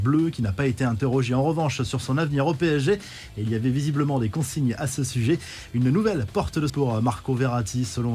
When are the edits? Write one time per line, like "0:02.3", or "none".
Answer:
0:06.7